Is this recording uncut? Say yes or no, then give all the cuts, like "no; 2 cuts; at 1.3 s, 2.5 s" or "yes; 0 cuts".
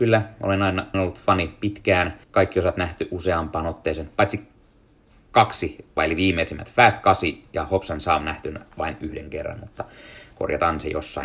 no; 3 cuts; at 0.9 s, 2.2 s, 6.0 s